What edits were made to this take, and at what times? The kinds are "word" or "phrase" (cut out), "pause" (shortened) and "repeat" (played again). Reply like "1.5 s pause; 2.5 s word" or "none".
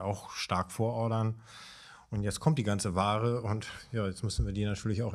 none